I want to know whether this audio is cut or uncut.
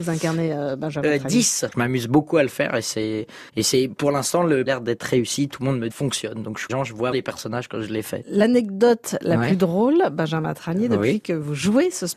cut